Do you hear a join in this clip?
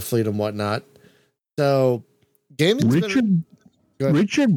no; 0 cuts

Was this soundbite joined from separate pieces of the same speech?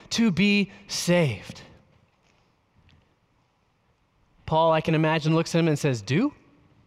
no; 0 cuts

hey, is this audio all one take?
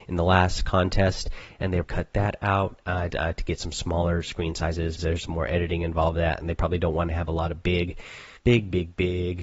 no; 4 cuts; at 1.8 s, 3.1 s, 5.0 s, 8.4 s

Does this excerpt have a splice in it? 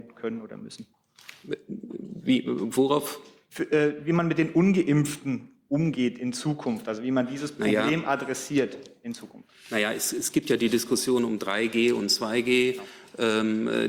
no; 0 cuts

